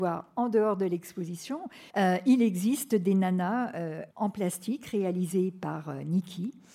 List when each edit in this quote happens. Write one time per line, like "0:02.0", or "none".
0:01.9
0:04.1